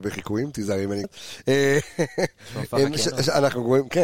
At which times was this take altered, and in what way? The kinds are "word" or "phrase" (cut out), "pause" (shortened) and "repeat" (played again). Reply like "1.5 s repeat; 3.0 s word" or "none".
1.0 s word